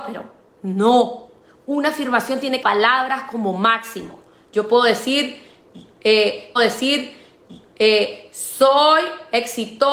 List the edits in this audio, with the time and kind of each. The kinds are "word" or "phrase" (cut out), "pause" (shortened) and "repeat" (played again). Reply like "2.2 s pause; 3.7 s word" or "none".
2.6 s phrase; 6.6 s repeat